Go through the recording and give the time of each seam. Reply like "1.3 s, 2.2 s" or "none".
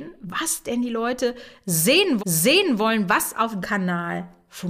2.2 s, 3.6 s